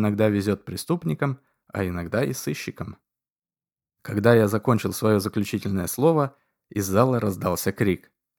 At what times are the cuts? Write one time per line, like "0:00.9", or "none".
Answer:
none